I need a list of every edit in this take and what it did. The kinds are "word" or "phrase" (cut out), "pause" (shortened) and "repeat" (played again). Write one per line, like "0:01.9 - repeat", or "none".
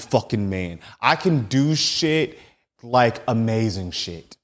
none